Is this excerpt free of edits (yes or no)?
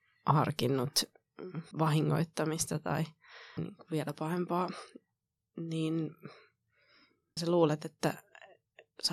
no